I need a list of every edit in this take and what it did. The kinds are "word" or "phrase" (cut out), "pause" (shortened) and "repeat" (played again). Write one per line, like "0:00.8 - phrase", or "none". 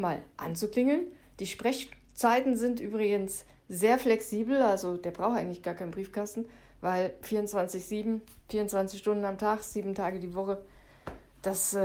none